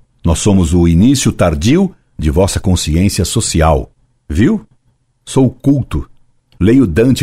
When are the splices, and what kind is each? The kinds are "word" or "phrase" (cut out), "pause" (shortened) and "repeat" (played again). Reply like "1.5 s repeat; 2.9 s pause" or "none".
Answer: none